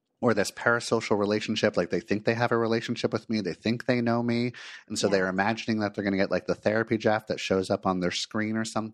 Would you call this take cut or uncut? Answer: uncut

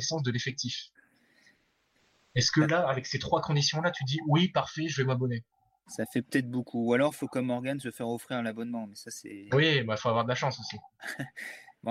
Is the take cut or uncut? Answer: uncut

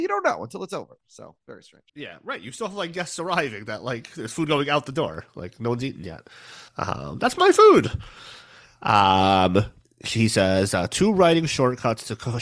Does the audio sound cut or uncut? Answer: cut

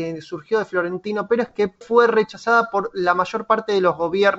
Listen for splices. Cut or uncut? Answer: cut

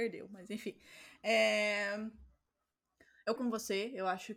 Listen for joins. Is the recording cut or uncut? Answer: cut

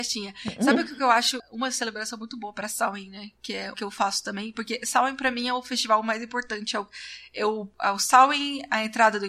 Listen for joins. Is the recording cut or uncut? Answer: cut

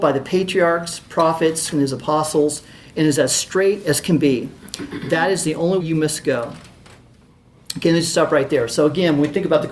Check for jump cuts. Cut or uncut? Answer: cut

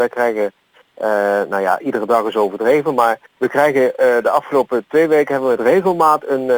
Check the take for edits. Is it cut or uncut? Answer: cut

